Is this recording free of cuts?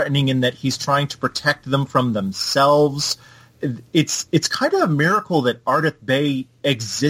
yes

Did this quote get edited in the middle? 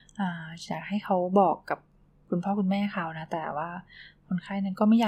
no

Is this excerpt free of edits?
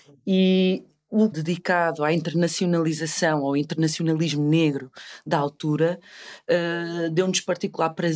no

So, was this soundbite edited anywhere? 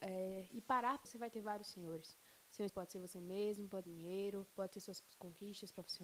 yes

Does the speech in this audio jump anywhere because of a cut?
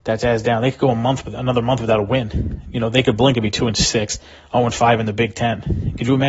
no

